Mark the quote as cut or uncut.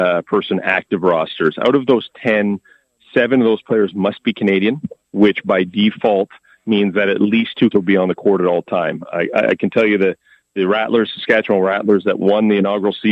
cut